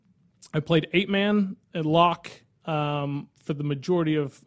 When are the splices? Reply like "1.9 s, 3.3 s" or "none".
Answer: none